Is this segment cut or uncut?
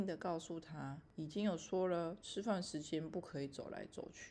uncut